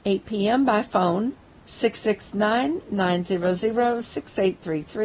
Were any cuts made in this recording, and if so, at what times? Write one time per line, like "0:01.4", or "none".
0:01.5